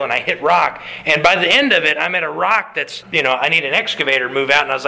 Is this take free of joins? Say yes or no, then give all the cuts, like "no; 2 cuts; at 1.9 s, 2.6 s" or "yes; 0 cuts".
no; 1 cut; at 3.0 s